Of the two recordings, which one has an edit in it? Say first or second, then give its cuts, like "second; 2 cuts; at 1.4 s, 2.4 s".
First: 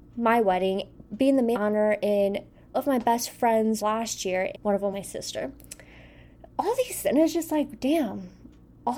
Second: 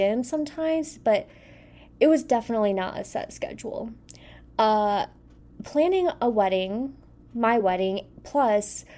first; 7 cuts; at 1.0 s, 1.5 s, 2.7 s, 3.8 s, 4.5 s, 4.9 s, 7.0 s